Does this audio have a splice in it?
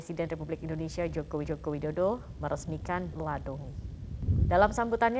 yes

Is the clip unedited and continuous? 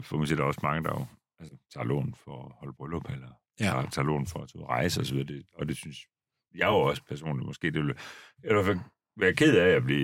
yes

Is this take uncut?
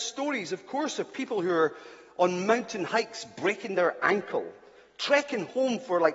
yes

